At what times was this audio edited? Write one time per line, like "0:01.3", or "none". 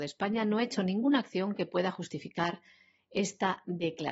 none